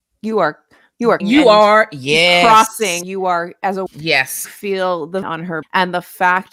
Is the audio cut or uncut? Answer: cut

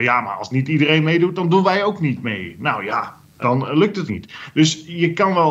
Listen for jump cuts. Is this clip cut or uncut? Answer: cut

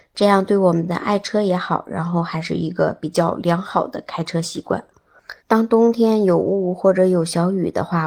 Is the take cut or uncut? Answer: cut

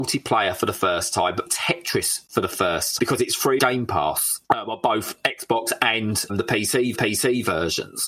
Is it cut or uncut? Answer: cut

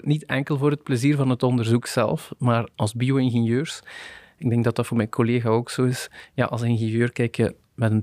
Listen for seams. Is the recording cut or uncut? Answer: uncut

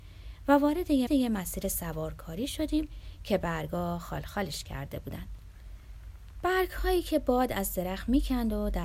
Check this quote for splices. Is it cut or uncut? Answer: cut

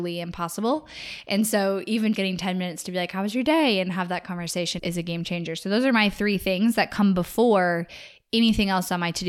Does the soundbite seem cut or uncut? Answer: cut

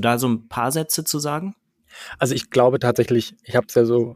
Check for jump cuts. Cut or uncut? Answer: uncut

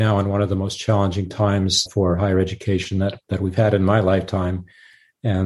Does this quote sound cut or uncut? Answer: cut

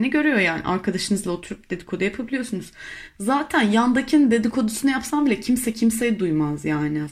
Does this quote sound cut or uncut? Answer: uncut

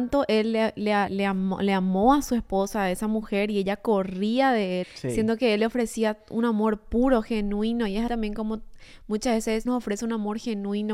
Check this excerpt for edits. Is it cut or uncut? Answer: cut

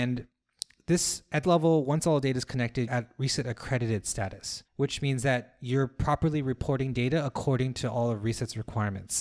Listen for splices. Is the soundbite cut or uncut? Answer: cut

